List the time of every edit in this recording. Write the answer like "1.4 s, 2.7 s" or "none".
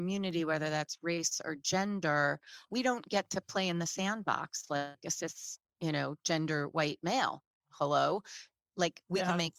2.7 s